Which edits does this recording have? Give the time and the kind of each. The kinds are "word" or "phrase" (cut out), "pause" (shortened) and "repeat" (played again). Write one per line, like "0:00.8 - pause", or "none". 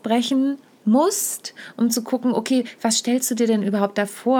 none